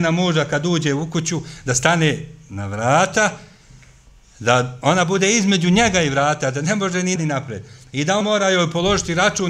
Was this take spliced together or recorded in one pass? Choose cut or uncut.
cut